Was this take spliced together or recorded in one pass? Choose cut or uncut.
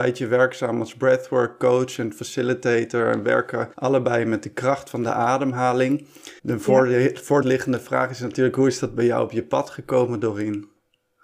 cut